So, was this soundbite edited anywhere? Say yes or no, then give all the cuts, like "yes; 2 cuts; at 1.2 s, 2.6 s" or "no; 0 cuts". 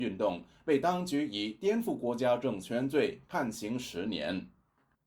no; 0 cuts